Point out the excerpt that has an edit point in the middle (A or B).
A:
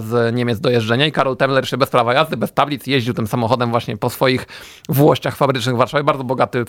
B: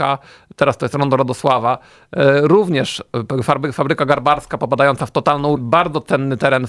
B